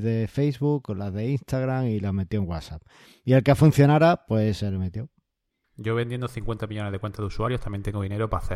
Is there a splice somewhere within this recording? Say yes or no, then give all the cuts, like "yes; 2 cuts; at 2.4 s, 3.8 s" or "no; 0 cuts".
no; 0 cuts